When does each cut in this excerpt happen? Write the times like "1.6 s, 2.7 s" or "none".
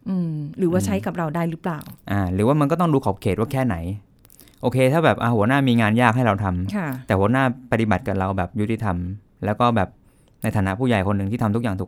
none